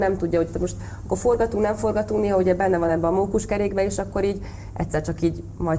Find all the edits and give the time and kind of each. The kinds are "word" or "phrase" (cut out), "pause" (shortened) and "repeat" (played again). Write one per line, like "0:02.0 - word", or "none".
none